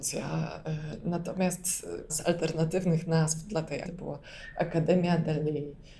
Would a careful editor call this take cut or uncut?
cut